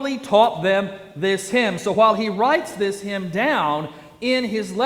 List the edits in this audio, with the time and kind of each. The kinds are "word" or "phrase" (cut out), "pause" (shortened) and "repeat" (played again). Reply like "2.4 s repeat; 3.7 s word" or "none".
none